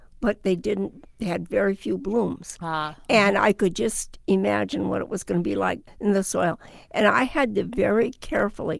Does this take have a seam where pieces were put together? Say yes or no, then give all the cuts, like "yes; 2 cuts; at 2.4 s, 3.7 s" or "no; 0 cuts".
no; 0 cuts